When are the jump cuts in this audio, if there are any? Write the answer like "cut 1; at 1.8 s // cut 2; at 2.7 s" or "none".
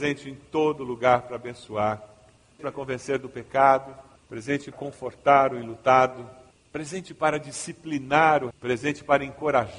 cut 1; at 2.6 s // cut 2; at 4.7 s // cut 3; at 8.5 s